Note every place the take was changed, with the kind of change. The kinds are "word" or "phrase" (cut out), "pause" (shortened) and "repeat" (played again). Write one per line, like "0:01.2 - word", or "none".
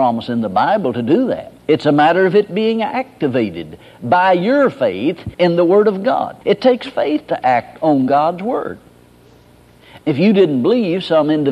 0:01.6 - pause
0:05.3 - pause
0:06.4 - pause